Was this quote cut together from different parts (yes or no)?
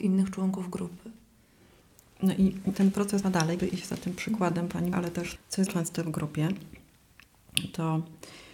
yes